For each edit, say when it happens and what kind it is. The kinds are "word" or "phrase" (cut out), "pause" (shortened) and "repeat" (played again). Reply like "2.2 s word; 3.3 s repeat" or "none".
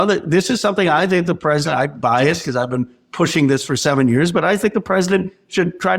none